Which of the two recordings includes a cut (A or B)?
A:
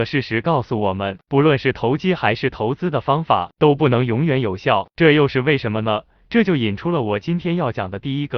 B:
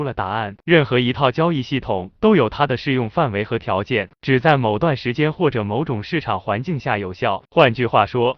B